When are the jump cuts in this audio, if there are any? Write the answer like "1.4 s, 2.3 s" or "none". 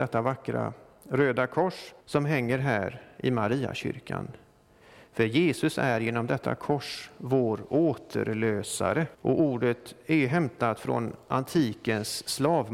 2.0 s, 9.1 s